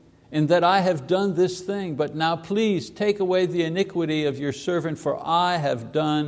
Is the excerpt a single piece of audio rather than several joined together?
yes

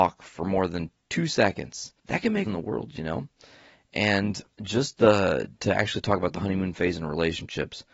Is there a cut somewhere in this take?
yes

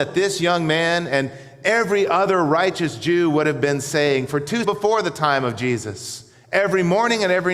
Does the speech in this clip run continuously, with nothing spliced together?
no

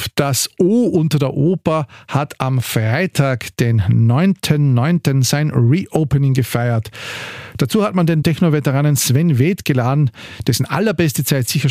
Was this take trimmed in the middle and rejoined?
yes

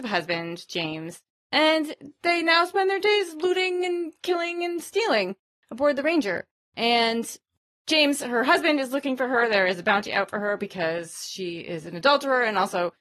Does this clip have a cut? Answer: no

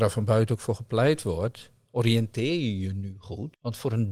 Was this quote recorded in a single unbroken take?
yes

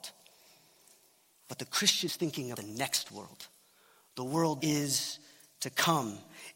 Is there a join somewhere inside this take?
yes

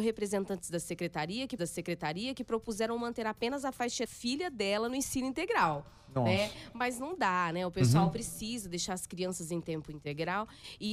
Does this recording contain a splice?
yes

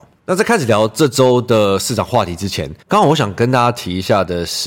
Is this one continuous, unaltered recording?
no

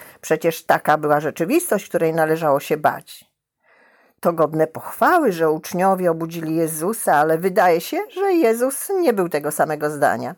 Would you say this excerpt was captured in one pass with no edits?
yes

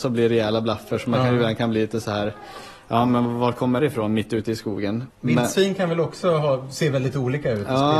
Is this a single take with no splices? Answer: no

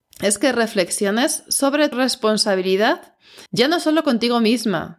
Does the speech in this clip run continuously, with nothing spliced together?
no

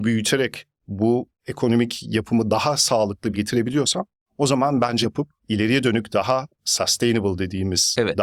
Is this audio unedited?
no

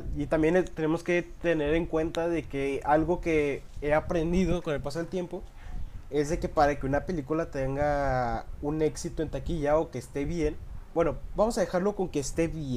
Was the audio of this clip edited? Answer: no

